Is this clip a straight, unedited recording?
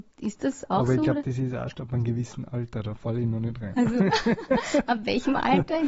yes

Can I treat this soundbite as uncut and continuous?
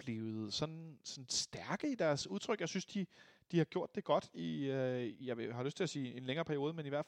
yes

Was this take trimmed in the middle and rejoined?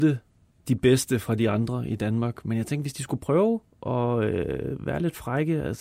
yes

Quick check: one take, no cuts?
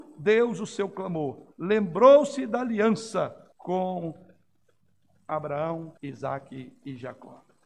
no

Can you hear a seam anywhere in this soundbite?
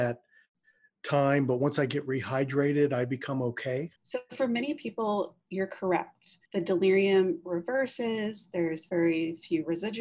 yes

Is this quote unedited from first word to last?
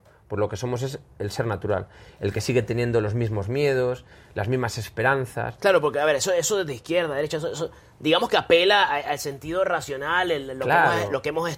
yes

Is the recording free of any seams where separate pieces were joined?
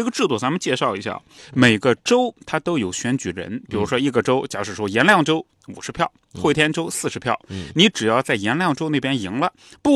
yes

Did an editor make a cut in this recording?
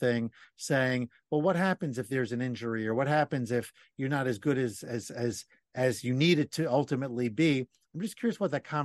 no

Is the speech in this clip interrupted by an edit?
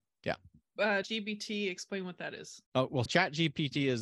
yes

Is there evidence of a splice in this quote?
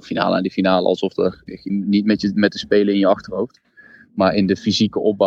yes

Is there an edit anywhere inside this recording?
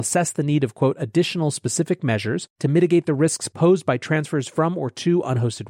yes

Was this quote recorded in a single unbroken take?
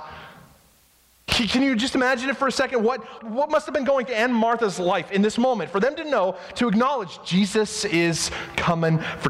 no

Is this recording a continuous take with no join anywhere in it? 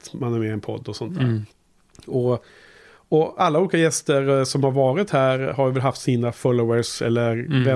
yes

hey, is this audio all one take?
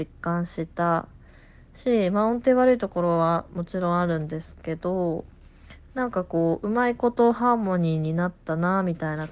yes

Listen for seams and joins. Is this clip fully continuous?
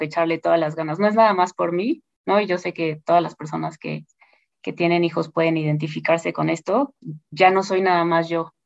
yes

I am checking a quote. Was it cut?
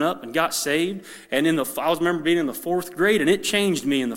no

